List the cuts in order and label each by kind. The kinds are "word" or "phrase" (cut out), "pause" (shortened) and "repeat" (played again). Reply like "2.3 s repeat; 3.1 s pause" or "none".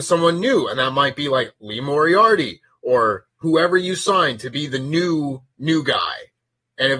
none